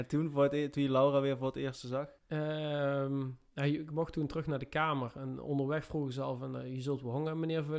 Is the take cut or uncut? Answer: cut